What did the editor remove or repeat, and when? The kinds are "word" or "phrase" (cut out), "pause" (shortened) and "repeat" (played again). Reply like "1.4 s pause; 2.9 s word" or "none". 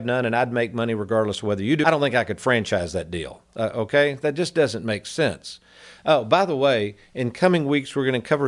1.8 s phrase